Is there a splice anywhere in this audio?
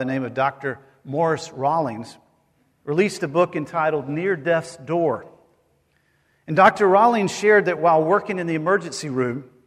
no; 0 cuts

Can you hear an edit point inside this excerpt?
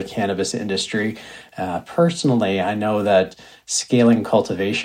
no; 0 cuts

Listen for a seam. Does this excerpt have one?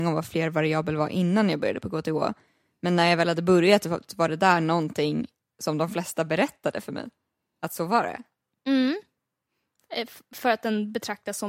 no; 0 cuts

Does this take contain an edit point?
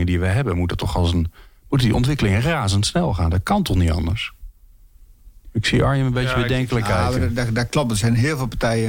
no; 0 cuts

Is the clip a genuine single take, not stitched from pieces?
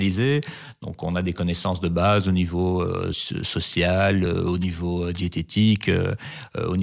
yes; 0 cuts

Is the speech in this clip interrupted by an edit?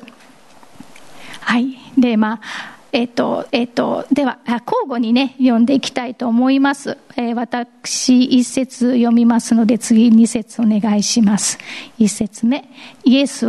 yes; 1 cut; at 3.5 s

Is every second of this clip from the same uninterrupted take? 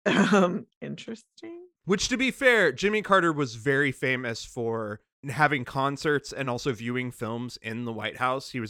yes; 0 cuts

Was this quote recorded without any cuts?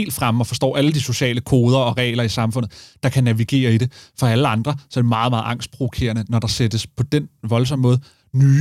yes; 0 cuts

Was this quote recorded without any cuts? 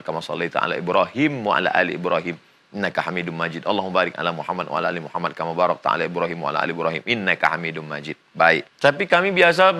no; 1 cut; at 8.7 s

